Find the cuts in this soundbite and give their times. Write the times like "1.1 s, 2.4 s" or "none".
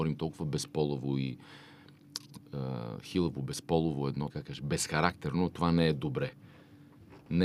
4.3 s